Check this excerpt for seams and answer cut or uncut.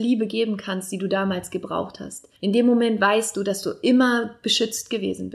cut